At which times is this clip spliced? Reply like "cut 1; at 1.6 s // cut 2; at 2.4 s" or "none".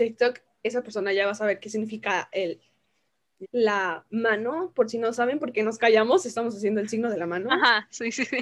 cut 1; at 3.4 s

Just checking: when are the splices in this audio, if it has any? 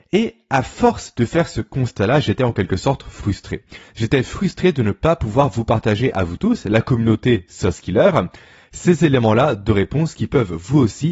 none

